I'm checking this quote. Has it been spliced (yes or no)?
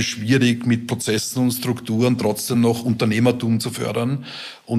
no